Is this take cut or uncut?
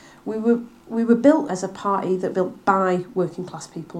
cut